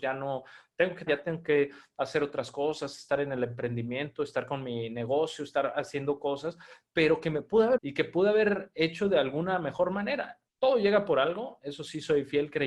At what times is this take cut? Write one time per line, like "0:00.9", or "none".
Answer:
0:01.1
0:07.8
0:10.5